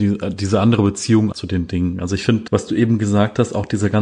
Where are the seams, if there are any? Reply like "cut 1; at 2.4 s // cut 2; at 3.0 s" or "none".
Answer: cut 1; at 1.3 s // cut 2; at 2.5 s